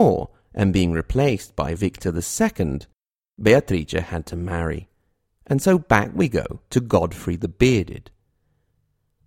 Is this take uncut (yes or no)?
yes